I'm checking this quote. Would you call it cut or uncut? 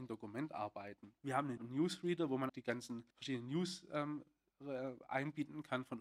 cut